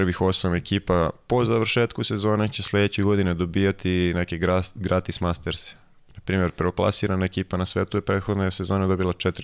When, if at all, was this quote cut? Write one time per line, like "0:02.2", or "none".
none

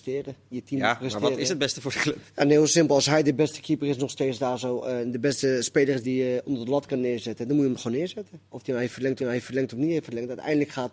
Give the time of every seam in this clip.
0:06.0
0:08.5
0:09.2

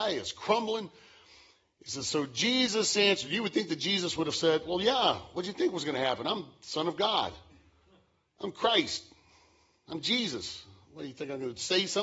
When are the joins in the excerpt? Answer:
none

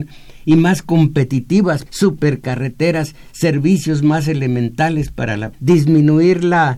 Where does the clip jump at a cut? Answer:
0:01.9
0:05.5

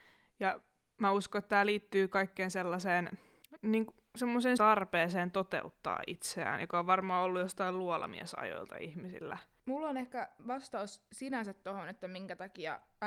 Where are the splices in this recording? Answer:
0:04.6

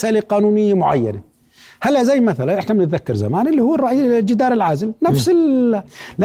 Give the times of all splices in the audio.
none

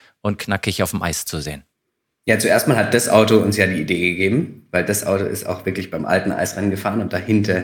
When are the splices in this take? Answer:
none

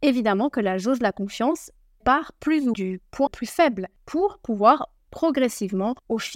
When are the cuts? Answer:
0:02.0
0:02.7
0:03.3
0:05.0

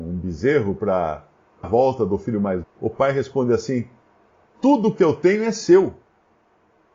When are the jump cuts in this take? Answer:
0:01.6
0:02.6

